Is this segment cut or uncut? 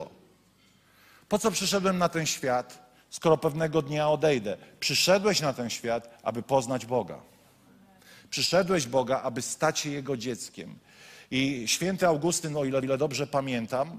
cut